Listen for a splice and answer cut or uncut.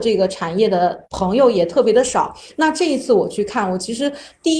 cut